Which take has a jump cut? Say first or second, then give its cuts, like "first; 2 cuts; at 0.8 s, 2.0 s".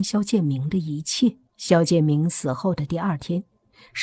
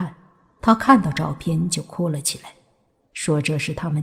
first; 1 cut; at 1.5 s